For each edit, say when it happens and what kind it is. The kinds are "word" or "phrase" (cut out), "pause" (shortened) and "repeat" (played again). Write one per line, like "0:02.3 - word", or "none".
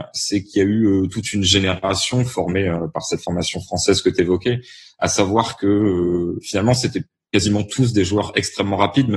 none